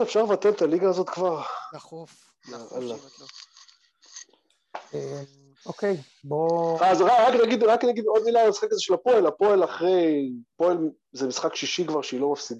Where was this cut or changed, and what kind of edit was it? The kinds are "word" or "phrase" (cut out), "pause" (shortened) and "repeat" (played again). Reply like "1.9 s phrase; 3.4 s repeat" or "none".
2.4 s pause; 10.5 s pause